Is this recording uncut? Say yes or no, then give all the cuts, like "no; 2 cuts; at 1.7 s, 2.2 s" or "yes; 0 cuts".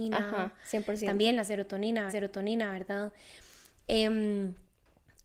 no; 1 cut; at 2.1 s